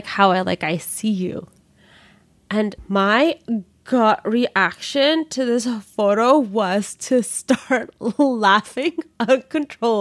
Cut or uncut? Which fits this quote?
uncut